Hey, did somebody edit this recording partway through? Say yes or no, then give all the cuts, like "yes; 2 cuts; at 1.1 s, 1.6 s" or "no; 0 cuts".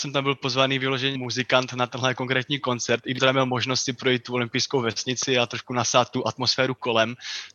yes; 2 cuts; at 1.1 s, 3.2 s